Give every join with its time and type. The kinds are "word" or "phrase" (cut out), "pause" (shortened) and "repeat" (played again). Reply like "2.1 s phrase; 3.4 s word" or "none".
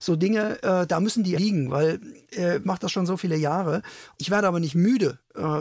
1.3 s word; 2.6 s phrase; 4.2 s word